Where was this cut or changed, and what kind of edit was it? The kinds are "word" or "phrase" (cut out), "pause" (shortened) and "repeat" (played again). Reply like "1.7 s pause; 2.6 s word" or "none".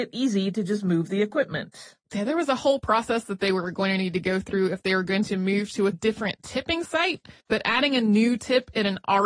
2.0 s pause; 5.9 s word; 7.4 s pause